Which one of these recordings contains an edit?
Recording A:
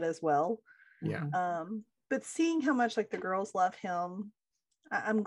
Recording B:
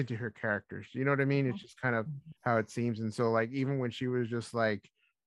B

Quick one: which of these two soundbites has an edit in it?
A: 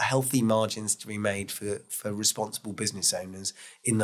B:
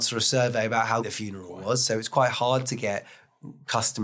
B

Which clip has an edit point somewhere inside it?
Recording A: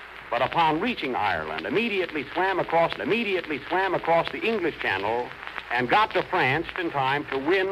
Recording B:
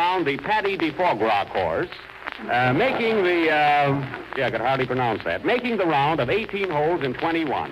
A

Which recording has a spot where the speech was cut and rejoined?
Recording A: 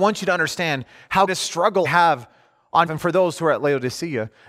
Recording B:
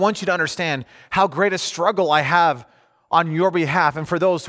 A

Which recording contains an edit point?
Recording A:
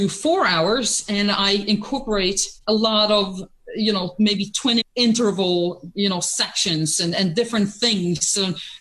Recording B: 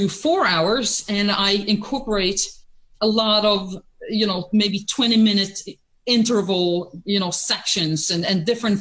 A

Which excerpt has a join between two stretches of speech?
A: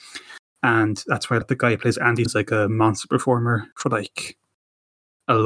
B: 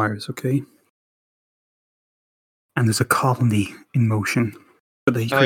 A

